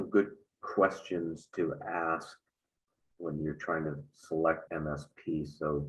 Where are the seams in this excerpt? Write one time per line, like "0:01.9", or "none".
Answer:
0:04.7